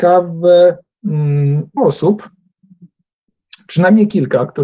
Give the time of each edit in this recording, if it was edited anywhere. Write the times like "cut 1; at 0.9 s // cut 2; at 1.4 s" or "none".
cut 1; at 1.8 s